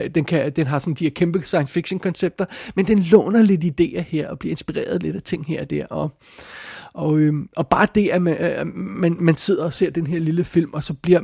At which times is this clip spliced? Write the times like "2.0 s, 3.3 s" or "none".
none